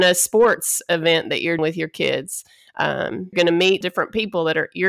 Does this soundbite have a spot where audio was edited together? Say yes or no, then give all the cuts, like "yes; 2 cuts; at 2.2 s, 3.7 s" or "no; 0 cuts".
yes; 3 cuts; at 1.6 s, 3.3 s, 3.8 s